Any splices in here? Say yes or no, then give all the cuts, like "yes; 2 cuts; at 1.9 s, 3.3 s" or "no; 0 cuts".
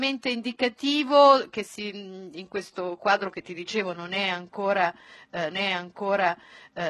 yes; 1 cut; at 5.5 s